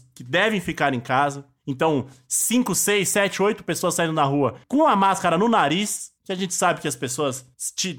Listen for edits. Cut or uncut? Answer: uncut